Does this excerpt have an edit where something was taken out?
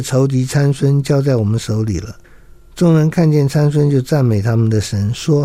yes; 1 cut; at 2.2 s

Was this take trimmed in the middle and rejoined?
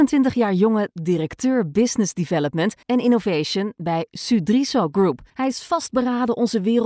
yes; 2 cuts; at 2.8 s, 5.3 s

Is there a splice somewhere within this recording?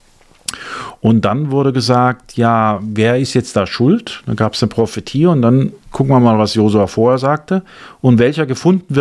yes; 1 cut; at 5.8 s

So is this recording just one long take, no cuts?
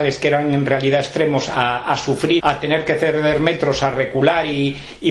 no; 1 cut; at 2.4 s

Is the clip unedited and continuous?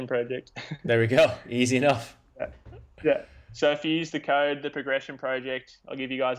yes; 0 cuts

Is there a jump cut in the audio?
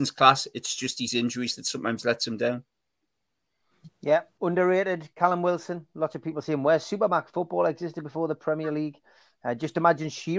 no; 0 cuts

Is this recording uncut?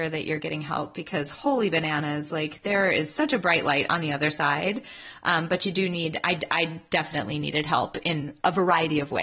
yes; 0 cuts

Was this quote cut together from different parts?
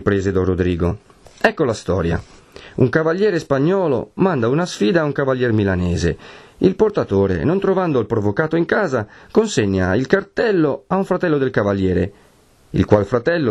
no; 0 cuts

